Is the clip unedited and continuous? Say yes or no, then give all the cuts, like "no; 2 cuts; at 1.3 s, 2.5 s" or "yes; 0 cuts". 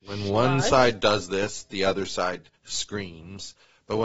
no; 1 cut; at 2.6 s